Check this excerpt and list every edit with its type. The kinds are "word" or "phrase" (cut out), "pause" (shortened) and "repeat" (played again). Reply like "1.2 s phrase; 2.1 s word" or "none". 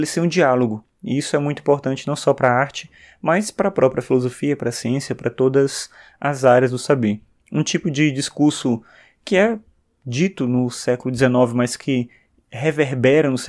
none